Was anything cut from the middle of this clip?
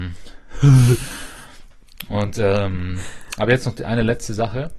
no; 0 cuts

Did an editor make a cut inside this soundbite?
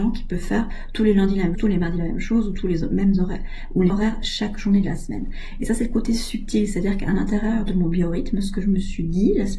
yes; 2 cuts; at 1.5 s, 3.9 s

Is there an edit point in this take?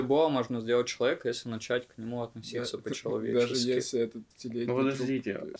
no; 0 cuts

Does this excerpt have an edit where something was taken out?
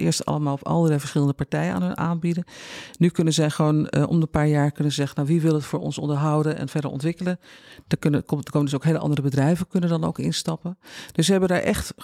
no; 0 cuts

